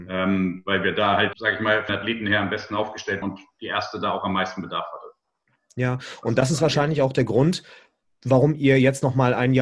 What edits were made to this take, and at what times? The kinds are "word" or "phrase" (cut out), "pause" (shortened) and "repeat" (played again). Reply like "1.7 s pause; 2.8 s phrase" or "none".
1.3 s word; 1.9 s word; 3.2 s word